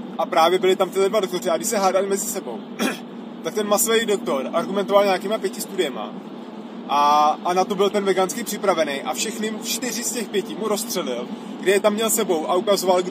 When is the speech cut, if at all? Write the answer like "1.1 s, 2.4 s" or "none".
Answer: none